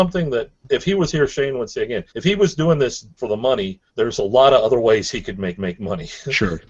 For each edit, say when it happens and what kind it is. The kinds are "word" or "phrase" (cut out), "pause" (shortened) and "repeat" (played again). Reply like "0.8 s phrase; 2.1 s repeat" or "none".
2.1 s pause; 3.2 s word; 3.9 s pause; 5.6 s repeat